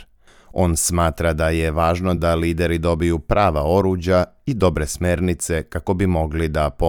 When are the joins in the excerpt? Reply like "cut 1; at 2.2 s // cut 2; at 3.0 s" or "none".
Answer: none